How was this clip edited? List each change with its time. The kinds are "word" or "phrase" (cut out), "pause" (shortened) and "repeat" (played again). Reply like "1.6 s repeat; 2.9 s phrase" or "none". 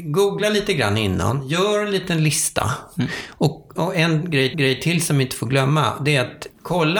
3.8 s word; 4.5 s repeat